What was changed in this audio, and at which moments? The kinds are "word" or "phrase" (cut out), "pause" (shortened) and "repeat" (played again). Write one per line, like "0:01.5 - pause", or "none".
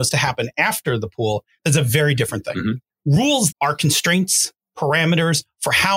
0:03.5 - word